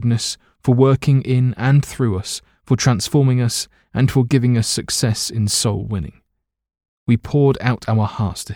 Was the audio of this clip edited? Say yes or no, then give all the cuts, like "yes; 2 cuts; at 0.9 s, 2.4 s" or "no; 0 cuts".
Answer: no; 0 cuts